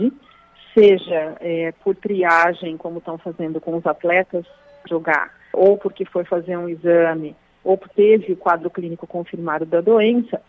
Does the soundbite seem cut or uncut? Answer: cut